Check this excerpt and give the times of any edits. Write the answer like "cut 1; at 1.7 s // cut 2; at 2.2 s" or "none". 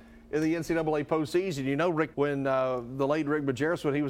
cut 1; at 2.1 s